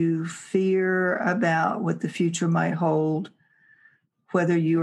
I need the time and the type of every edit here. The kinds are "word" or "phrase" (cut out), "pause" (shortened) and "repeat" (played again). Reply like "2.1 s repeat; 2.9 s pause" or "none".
none